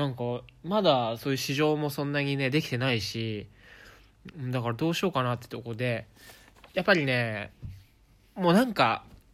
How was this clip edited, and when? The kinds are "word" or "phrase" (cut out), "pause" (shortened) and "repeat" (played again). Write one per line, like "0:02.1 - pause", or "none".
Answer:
0:06.7 - word